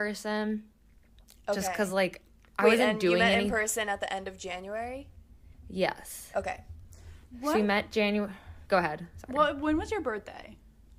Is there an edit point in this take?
no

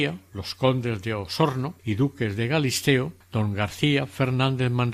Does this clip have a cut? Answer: yes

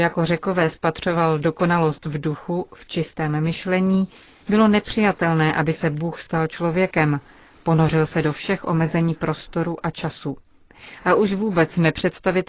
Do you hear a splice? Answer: no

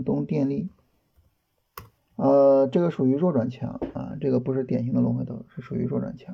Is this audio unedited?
no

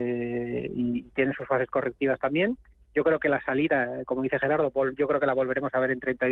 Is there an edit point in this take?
no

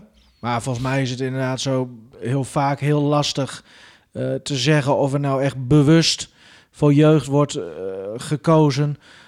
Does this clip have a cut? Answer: no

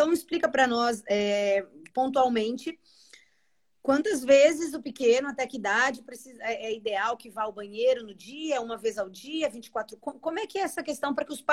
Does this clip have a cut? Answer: no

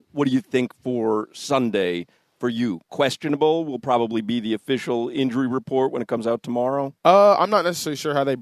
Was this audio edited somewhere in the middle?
no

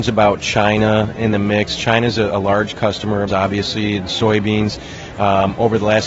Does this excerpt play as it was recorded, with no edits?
no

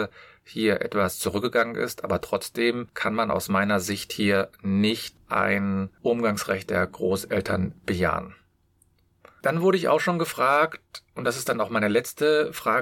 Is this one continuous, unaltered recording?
yes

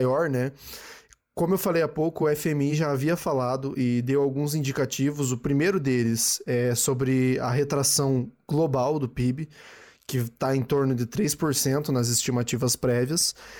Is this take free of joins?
yes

